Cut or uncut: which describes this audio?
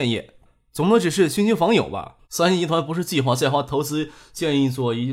cut